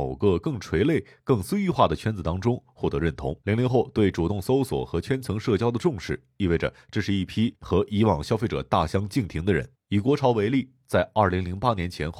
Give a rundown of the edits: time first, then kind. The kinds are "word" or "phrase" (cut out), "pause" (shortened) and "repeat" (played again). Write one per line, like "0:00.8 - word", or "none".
0:03.4 - pause
0:09.7 - pause